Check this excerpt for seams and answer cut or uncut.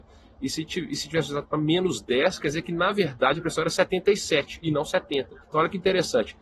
cut